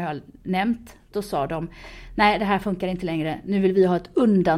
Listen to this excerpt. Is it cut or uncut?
uncut